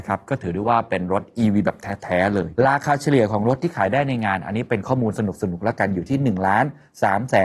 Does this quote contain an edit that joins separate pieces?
no; 0 cuts

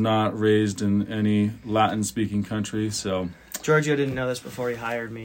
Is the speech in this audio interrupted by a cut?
no; 0 cuts

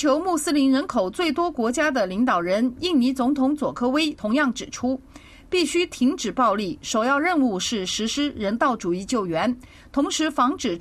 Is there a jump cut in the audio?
no; 0 cuts

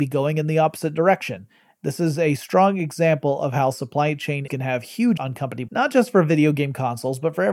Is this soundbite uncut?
no; 3 cuts; at 4.5 s, 5.2 s, 5.7 s

